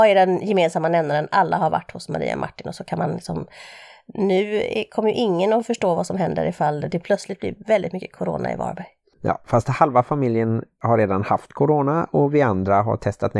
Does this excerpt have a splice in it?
no; 0 cuts

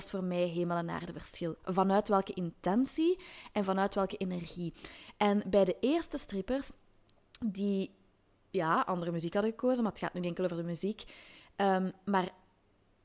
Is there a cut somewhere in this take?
no; 0 cuts

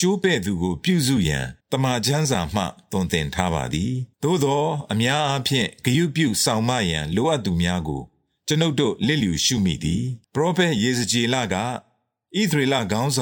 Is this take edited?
yes; 3 cuts; at 1.6 s, 4.1 s, 10.2 s

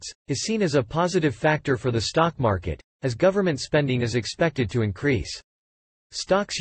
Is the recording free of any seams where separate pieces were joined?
yes; 0 cuts

